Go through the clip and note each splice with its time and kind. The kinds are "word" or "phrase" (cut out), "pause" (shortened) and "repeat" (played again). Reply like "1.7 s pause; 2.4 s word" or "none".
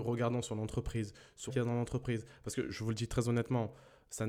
1.5 s word; 2.7 s word